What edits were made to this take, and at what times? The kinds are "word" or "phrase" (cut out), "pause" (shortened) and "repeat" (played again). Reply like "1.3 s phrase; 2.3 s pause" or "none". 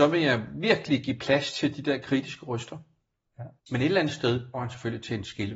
3.6 s pause; 4.5 s word